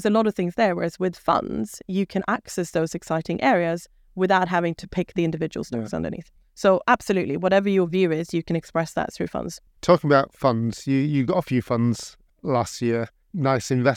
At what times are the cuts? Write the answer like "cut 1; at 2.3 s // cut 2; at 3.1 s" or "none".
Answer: none